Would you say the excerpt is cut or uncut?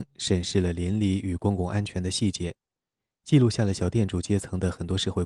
uncut